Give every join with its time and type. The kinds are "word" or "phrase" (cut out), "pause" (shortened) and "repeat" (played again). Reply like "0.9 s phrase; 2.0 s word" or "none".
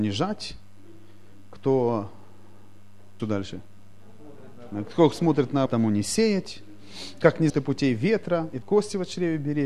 3.2 s phrase; 5.7 s word; 7.5 s word; 8.6 s phrase